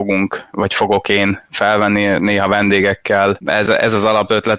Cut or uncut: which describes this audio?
uncut